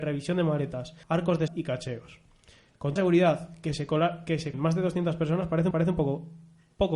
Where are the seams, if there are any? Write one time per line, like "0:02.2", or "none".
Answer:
0:01.0
0:01.5
0:03.0
0:04.5
0:05.7